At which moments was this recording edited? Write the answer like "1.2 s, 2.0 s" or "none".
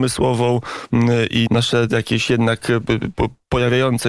1.5 s